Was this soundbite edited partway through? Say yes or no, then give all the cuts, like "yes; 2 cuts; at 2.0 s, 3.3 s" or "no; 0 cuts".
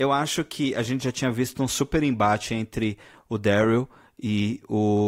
no; 0 cuts